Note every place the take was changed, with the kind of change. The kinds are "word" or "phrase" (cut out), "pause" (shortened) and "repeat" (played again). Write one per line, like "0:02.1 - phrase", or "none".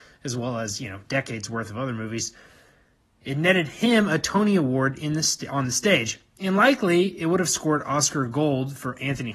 none